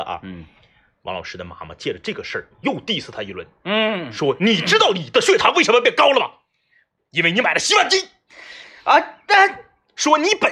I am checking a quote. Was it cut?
no; 0 cuts

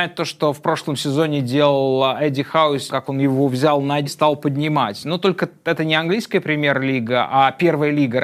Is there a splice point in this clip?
yes; 2 cuts; at 2.9 s, 4.1 s

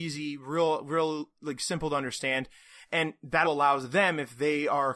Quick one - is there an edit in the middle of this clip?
yes; 2 cuts; at 1.4 s, 3.4 s

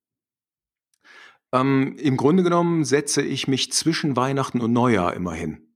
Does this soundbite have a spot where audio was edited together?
no; 0 cuts

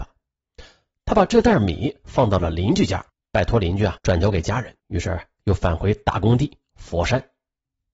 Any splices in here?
yes; 3 cuts; at 3.1 s, 4.0 s, 4.8 s

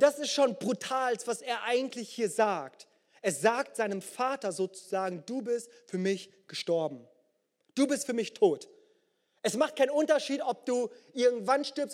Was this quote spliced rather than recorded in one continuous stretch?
no; 0 cuts

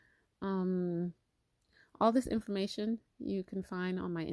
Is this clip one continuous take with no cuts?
yes; 0 cuts

